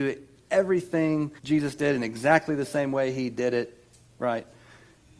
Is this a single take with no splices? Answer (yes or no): no